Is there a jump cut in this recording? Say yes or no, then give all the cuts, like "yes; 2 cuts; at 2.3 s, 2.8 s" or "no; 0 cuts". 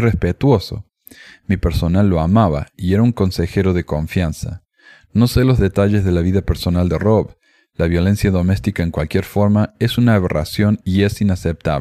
no; 0 cuts